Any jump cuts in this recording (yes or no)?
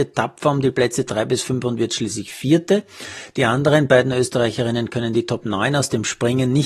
no